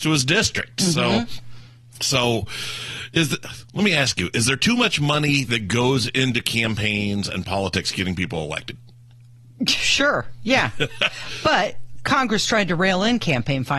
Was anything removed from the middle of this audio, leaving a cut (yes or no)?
no